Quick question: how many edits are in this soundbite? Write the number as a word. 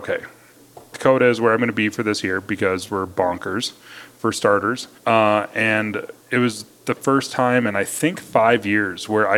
three